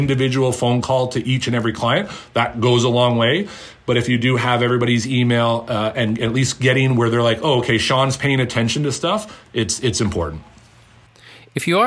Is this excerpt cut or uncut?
uncut